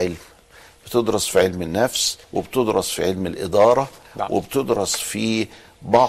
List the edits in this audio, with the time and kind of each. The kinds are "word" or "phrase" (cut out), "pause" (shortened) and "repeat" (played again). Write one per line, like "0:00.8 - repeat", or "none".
0:02.2 - pause